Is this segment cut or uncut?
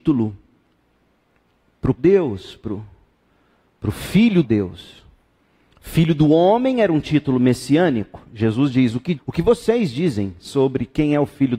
cut